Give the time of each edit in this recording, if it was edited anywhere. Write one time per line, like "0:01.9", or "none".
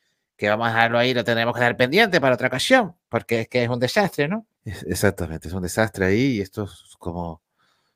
0:04.5